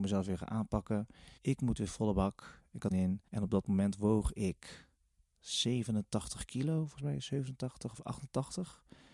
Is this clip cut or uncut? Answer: cut